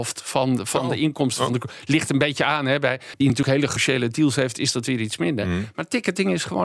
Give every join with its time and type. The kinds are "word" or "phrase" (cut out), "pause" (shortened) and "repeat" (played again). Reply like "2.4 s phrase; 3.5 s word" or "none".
3.2 s phrase; 3.8 s word